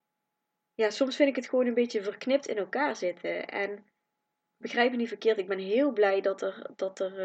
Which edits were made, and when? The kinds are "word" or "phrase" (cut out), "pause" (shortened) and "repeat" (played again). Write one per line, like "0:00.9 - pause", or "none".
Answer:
none